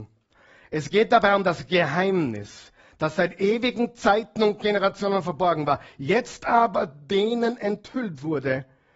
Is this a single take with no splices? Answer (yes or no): yes